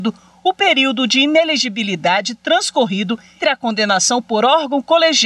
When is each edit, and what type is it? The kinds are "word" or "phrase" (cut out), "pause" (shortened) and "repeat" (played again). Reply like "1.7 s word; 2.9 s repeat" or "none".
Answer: 3.4 s word